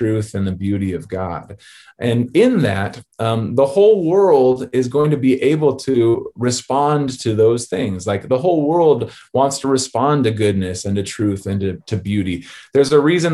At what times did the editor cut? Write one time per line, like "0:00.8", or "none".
none